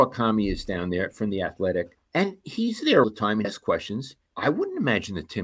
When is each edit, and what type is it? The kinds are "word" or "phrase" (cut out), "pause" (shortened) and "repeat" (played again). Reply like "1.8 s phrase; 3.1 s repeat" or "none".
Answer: 2.0 s pause; 3.0 s word; 3.4 s word; 4.3 s pause